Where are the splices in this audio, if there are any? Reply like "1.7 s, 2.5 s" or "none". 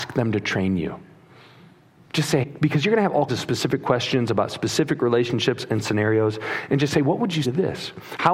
2.4 s, 3.3 s, 7.4 s

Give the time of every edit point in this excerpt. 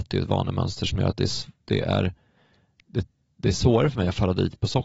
none

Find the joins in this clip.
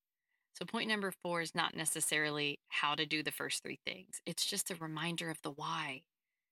none

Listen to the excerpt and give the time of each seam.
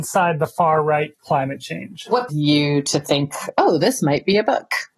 1.1 s, 2.3 s

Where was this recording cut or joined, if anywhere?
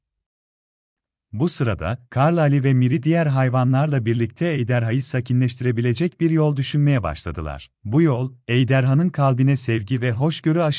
7.7 s

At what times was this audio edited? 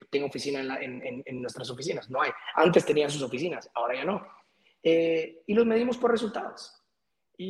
none

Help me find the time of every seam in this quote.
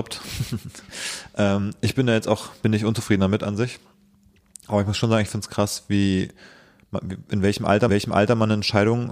7.9 s

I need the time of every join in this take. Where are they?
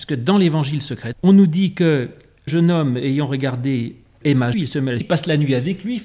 1.1 s, 2.5 s, 4.2 s, 4.5 s, 5.0 s

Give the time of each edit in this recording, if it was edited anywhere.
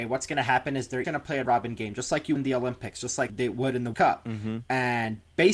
1.0 s, 1.5 s, 2.4 s, 3.3 s, 3.9 s

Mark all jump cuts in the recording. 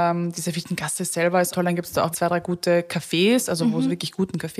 1.5 s, 2.1 s

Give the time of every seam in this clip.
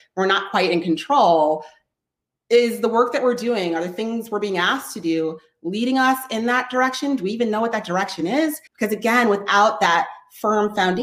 8.7 s

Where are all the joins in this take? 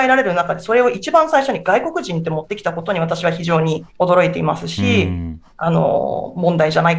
3.9 s

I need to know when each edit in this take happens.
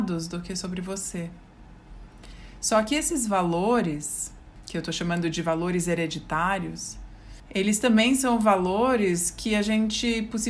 none

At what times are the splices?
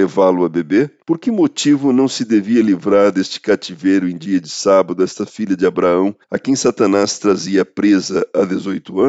1.0 s, 6.2 s

